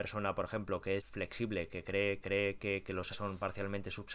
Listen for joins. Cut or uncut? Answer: cut